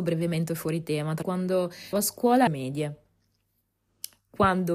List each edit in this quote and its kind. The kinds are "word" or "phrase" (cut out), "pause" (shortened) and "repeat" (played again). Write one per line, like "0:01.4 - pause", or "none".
0:01.2 - word
0:01.9 - word
0:02.5 - word